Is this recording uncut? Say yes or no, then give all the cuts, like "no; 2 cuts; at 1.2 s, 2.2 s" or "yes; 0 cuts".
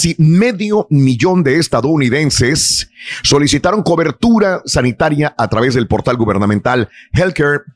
yes; 0 cuts